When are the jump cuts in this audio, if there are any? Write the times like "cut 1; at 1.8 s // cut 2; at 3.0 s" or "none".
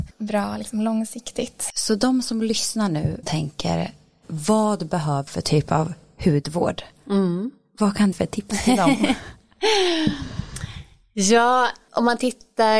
cut 1; at 3.2 s // cut 2; at 5.3 s // cut 3; at 8.1 s

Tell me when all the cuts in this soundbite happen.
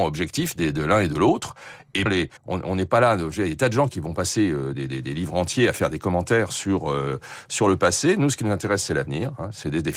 cut 1; at 2.1 s // cut 2; at 2.4 s // cut 3; at 4.7 s

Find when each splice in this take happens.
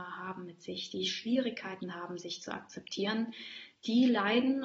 none

